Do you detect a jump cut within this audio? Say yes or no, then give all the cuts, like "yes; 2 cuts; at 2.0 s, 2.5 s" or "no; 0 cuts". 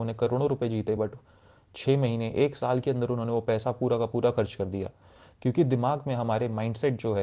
no; 0 cuts